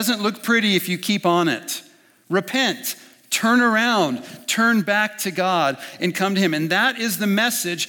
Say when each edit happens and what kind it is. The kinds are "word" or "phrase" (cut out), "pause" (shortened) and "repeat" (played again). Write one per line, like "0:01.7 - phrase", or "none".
none